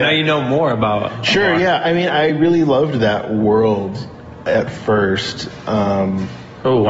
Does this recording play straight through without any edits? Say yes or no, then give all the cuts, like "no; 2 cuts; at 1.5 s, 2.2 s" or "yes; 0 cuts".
yes; 0 cuts